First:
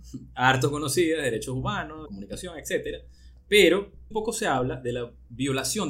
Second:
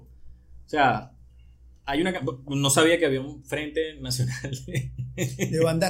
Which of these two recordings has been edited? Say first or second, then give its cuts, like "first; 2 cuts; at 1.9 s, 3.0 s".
first; 2 cuts; at 2.1 s, 4.1 s